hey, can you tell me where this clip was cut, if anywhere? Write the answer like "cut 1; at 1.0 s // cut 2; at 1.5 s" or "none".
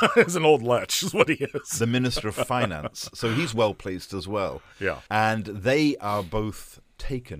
cut 1; at 5.1 s